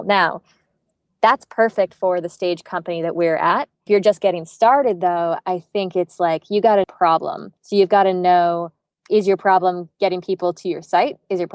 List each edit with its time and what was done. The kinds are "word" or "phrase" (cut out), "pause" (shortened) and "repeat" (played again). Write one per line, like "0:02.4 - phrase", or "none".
0:03.9 - phrase
0:06.8 - phrase
0:07.6 - pause
0:09.0 - word